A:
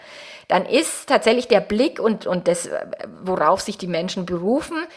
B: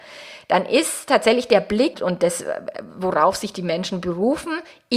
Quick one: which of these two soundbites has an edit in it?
B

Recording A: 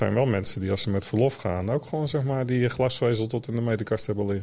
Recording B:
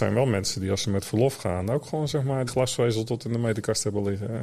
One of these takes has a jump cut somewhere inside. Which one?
B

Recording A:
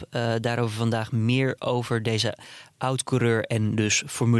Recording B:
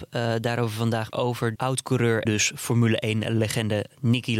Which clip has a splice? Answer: B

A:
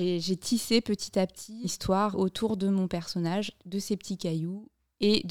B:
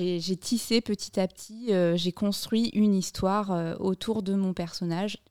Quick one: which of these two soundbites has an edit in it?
A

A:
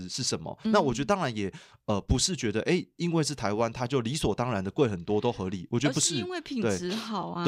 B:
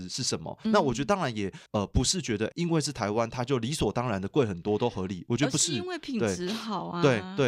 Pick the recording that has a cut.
B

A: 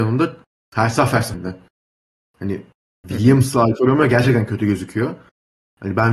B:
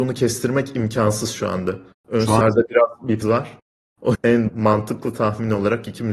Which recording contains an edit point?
B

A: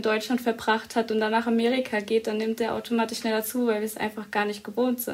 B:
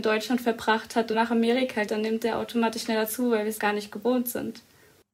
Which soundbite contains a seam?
B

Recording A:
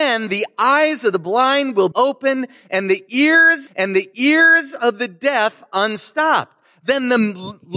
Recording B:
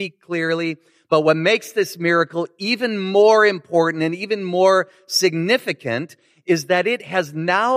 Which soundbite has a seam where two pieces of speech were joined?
A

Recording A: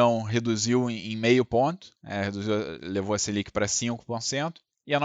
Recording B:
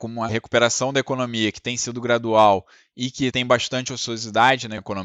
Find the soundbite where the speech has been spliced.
A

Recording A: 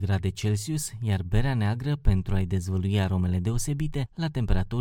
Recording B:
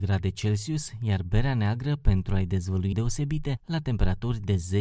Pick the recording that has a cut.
B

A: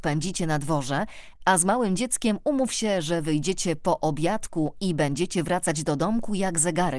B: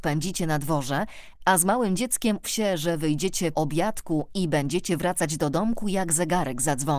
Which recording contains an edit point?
B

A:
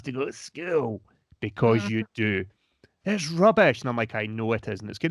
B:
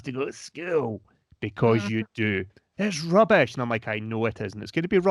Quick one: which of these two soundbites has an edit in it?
B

